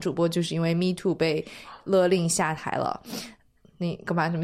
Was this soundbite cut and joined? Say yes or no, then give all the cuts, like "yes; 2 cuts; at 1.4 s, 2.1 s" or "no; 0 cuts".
no; 0 cuts